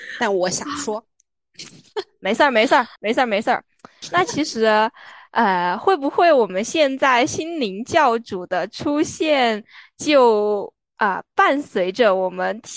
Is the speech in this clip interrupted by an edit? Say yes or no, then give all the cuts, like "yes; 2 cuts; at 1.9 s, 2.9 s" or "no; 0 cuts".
yes; 1 cut; at 3.0 s